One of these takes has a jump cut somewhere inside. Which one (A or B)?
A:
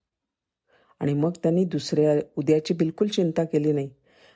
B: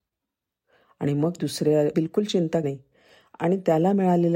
B